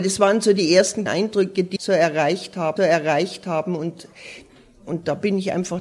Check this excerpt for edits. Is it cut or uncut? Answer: cut